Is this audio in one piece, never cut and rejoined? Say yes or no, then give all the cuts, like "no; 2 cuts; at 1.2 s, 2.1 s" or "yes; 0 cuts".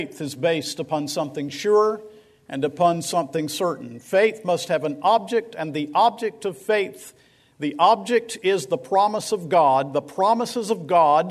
yes; 0 cuts